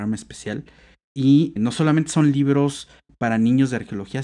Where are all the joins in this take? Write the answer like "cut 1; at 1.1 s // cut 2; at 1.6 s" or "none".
cut 1; at 1.6 s